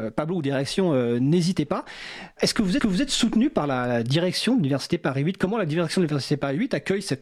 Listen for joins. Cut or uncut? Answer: cut